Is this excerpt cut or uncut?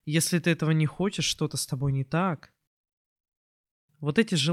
uncut